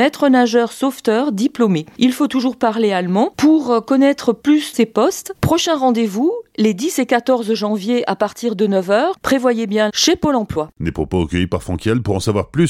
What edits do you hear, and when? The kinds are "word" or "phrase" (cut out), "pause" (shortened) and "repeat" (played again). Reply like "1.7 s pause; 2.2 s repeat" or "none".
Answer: 4.7 s phrase; 9.9 s phrase